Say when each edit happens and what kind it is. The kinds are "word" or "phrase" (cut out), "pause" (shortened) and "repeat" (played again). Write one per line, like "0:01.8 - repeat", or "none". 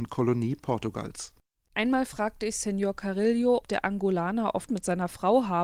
0:03.6 - word
0:04.7 - word